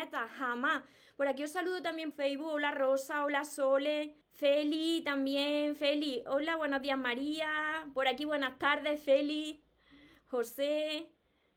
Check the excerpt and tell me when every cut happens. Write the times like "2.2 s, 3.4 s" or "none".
2.1 s, 4.2 s